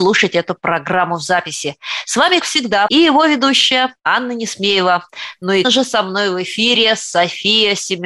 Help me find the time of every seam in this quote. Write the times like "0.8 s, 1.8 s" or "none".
2.4 s, 2.9 s, 4.0 s, 5.6 s

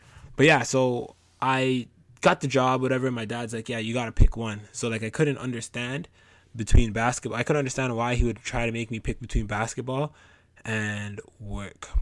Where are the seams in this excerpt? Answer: none

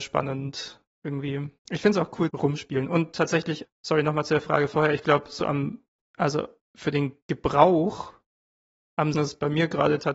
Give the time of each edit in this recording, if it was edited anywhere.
1.6 s, 2.3 s, 3.6 s, 6.0 s, 9.1 s

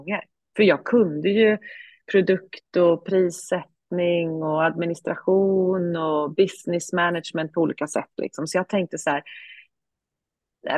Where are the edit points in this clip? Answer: none

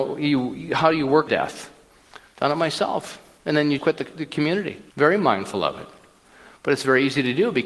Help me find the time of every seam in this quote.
1.3 s, 3.8 s, 4.9 s

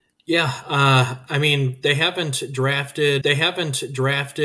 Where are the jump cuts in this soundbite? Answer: 3.2 s

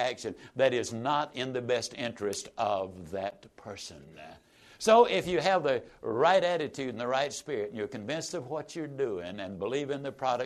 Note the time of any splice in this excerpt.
none

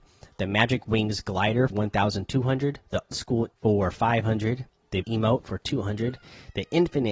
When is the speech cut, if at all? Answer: 1.7 s, 3.1 s, 3.5 s, 5.0 s

